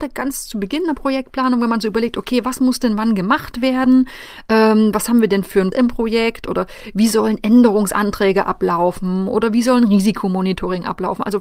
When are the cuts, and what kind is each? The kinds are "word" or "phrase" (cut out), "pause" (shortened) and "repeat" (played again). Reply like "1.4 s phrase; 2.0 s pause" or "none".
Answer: 5.7 s word